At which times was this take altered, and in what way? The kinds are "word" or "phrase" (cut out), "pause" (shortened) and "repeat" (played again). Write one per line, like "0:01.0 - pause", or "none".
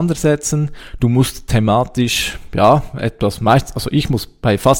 none